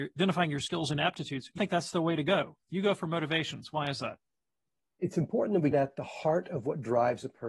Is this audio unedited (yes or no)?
no